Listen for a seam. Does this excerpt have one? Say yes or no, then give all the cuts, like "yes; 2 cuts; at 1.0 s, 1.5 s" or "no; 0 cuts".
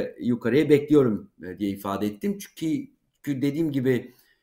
no; 0 cuts